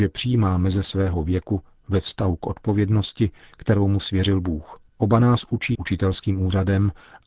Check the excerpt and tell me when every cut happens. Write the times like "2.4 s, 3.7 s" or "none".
4.9 s, 5.7 s

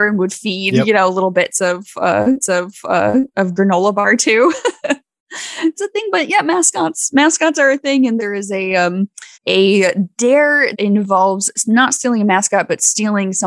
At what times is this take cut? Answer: 2.4 s, 5.7 s, 8.2 s, 9.3 s, 10.7 s

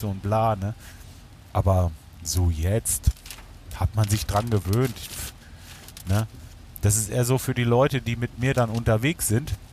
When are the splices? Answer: none

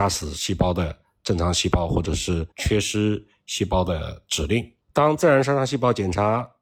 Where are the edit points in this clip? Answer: 2.5 s, 4.8 s

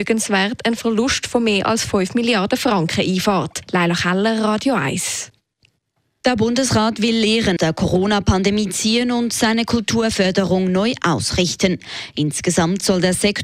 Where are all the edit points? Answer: 7.6 s

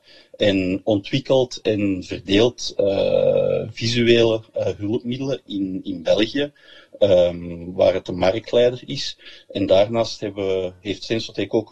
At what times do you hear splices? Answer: none

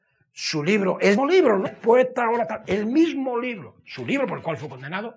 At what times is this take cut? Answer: 1.2 s, 1.6 s

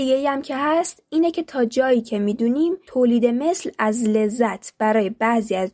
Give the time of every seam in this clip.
2.9 s

